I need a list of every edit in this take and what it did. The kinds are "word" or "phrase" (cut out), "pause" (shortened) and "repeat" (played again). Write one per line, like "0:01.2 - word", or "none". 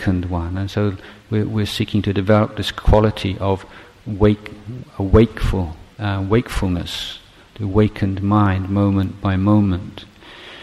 none